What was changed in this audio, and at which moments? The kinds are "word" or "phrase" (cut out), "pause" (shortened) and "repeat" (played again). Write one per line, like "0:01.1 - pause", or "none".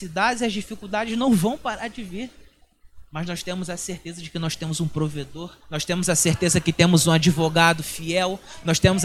0:05.6 - pause